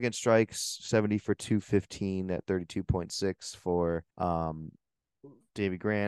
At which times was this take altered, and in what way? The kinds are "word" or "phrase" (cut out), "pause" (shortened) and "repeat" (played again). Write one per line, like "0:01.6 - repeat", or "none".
0:04.1 - pause